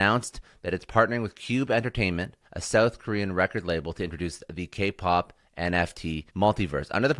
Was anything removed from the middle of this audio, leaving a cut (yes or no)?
yes